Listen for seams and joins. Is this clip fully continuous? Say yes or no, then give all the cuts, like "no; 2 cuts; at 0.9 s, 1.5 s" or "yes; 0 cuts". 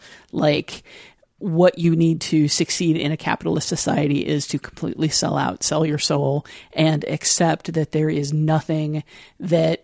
yes; 0 cuts